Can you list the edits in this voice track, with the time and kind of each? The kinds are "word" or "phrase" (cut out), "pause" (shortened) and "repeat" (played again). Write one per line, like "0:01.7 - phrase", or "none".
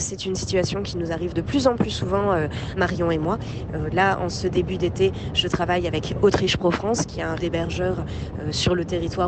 0:01.3 - word
0:02.8 - word
0:07.4 - word